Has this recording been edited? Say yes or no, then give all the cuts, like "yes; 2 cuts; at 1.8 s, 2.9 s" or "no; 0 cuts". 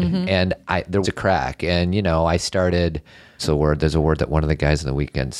yes; 2 cuts; at 1.0 s, 3.4 s